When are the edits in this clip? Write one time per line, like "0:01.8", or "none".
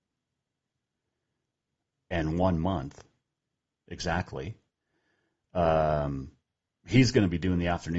none